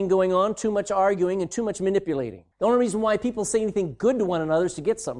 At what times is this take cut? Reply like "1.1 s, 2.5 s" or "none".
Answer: 2.5 s